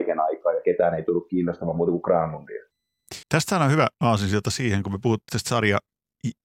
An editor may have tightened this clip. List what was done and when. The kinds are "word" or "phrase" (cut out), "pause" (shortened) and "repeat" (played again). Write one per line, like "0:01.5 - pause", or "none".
0:03.2 - pause
0:03.9 - pause
0:05.3 - word